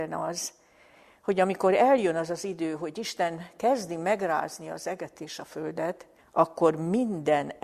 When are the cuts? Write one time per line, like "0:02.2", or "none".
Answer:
0:06.2